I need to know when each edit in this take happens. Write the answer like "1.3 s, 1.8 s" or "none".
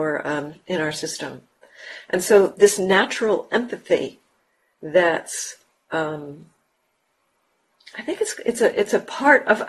none

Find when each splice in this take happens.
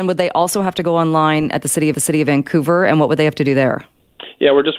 1.9 s

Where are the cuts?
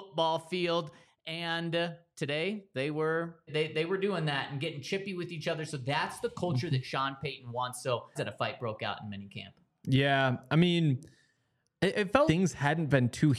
3.5 s, 8.2 s, 12.3 s

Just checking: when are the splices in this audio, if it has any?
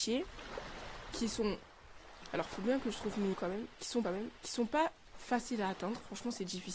3.3 s, 4.0 s

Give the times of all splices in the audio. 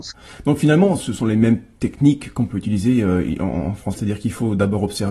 4.0 s

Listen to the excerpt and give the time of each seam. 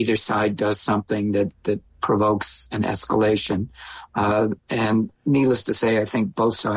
1.9 s, 5.2 s

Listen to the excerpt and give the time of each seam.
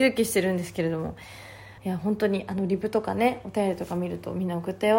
1.8 s

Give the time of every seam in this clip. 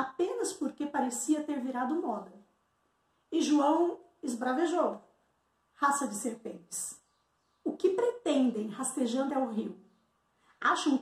9.3 s

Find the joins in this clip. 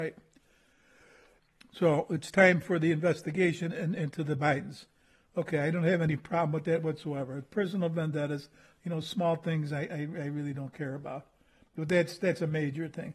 none

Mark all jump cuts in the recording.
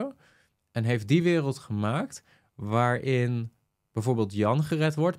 none

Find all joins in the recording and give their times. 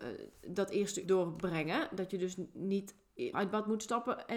1.0 s, 3.3 s

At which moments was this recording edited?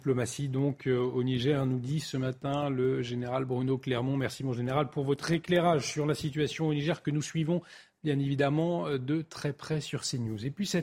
none

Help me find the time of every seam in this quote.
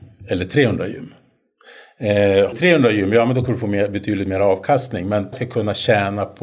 2.5 s, 3.5 s, 5.3 s

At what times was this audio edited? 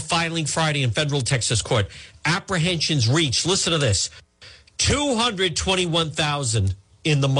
none

